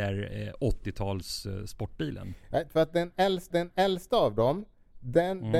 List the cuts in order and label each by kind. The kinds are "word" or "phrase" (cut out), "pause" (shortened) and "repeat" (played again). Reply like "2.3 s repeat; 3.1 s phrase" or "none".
2.7 s phrase; 3.5 s repeat

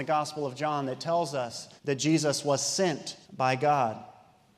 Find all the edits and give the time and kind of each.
1.8 s pause; 3.2 s pause

